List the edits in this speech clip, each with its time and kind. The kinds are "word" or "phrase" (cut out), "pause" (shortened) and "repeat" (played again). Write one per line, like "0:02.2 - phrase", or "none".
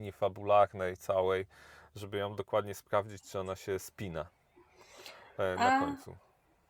none